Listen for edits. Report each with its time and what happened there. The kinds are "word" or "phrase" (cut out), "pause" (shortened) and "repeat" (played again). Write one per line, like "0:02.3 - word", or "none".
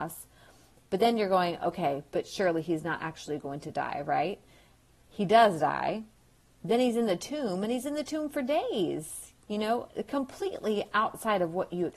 none